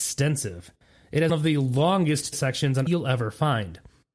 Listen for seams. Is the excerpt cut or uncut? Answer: cut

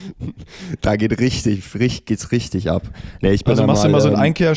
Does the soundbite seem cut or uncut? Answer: uncut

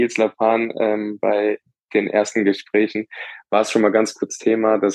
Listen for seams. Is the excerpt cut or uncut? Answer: uncut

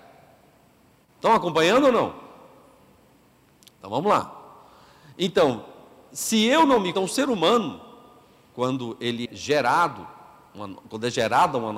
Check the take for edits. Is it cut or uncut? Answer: cut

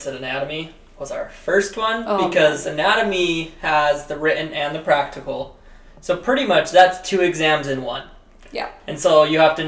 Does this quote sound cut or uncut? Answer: uncut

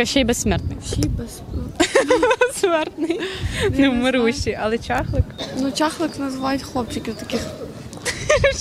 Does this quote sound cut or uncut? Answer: uncut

